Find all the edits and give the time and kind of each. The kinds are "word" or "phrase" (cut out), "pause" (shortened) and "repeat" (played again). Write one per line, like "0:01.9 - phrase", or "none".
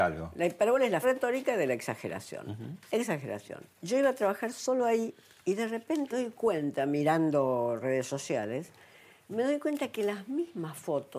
0:01.0 - word
0:03.7 - pause
0:06.1 - word